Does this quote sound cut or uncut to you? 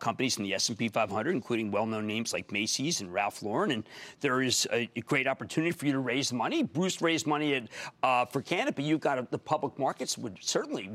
uncut